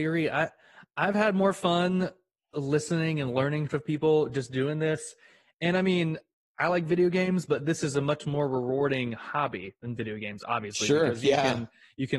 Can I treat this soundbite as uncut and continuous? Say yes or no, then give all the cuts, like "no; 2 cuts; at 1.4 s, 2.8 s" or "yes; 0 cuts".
yes; 0 cuts